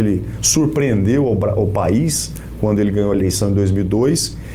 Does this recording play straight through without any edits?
no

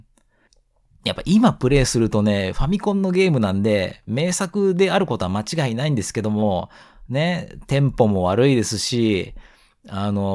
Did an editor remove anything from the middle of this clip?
no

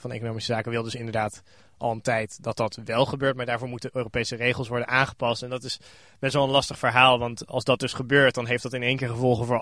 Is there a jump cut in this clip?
no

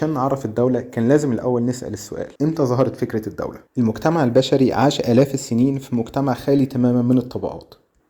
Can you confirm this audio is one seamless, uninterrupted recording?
no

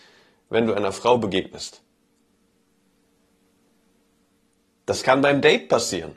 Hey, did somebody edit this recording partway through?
no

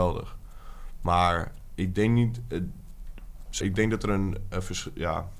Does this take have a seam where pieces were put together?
yes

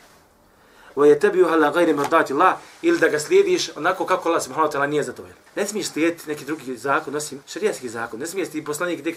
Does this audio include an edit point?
yes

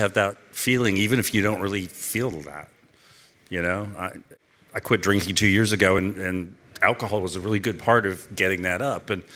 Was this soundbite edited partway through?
no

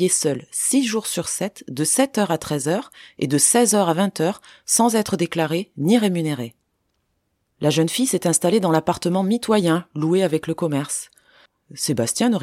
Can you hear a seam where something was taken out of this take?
no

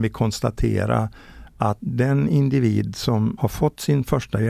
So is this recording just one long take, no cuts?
yes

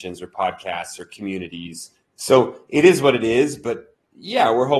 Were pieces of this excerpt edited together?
yes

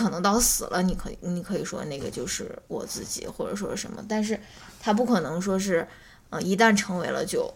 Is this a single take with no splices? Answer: yes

